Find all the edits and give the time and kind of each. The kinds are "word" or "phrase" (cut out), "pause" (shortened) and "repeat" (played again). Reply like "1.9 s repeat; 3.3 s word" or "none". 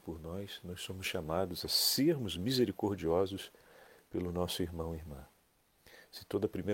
none